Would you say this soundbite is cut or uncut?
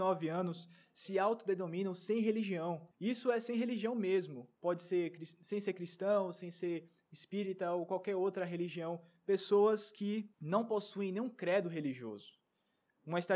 cut